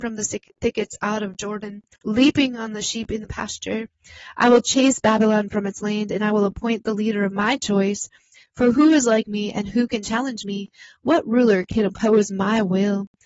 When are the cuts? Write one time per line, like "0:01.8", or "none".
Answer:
0:01.9